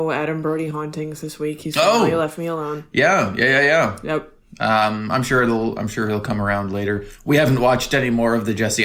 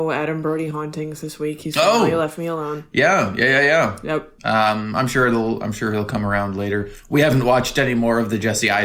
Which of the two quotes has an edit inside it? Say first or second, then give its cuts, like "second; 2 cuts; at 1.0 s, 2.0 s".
second; 1 cut; at 4.4 s